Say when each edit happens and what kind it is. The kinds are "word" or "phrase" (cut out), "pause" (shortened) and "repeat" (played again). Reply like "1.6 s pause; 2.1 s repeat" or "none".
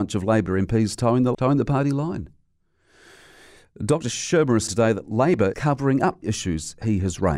1.3 s word; 4.7 s word; 5.5 s word; 6.2 s word